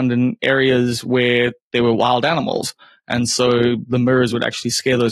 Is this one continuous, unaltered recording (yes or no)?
yes